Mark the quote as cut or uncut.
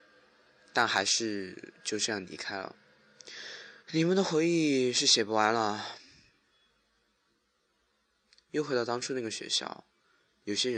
cut